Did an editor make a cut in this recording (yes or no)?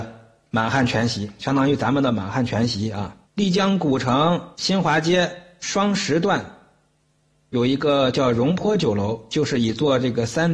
yes